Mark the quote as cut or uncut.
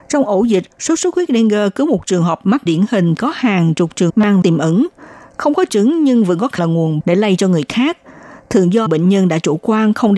cut